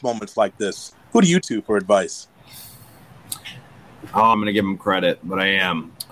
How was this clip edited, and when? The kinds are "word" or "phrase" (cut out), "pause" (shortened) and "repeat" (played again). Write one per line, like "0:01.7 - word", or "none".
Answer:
0:01.4 - word
0:04.3 - phrase